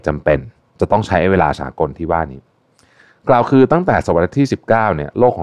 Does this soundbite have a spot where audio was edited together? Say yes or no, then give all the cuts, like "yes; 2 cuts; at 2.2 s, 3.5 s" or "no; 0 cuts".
no; 0 cuts